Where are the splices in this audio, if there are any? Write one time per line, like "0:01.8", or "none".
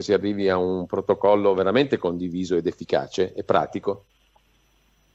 none